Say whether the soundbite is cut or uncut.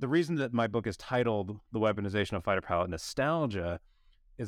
uncut